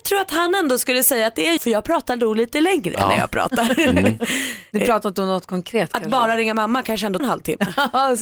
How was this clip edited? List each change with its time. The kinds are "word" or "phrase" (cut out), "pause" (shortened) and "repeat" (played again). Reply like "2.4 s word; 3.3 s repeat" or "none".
1.6 s word; 7.2 s word